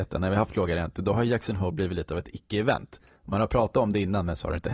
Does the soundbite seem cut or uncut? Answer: uncut